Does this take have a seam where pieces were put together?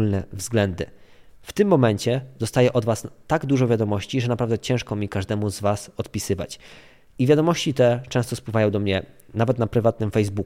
no; 0 cuts

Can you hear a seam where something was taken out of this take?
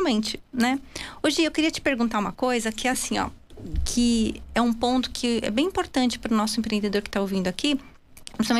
no; 0 cuts

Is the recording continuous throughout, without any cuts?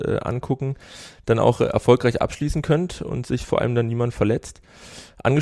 yes; 0 cuts

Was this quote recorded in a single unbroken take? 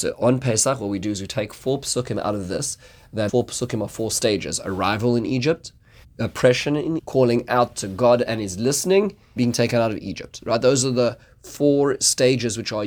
no; 4 cuts; at 3.3 s, 6.0 s, 7.0 s, 9.4 s

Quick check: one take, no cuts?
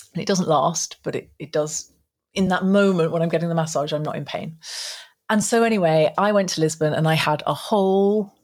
yes; 0 cuts

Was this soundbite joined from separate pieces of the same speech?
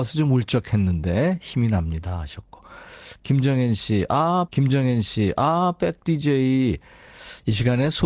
yes; 1 cut; at 4.5 s

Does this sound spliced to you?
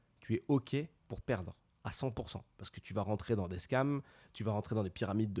yes; 1 cut; at 1.0 s

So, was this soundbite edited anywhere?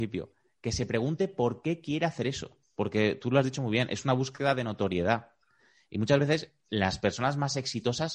no; 0 cuts

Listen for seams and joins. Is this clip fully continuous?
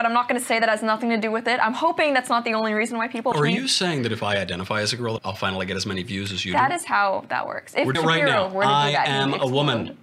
no; 3 cuts; at 3.3 s, 5.2 s, 7.9 s

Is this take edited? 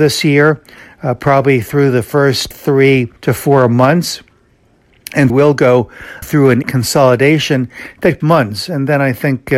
yes; 6 cuts; at 2.5 s, 3.2 s, 5.3 s, 6.2 s, 6.6 s, 8.2 s

